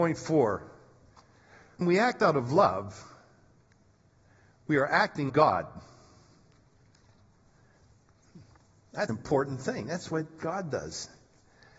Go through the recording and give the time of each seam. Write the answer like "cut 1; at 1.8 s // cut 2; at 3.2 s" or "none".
cut 1; at 1.8 s // cut 2; at 5.3 s // cut 3; at 9.1 s